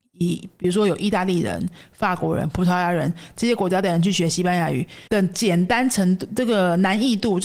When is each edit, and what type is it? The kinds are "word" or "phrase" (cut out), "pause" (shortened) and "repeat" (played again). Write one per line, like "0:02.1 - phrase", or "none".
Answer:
0:05.1 - pause